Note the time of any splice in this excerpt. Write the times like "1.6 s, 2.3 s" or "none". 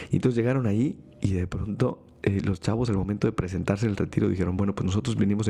none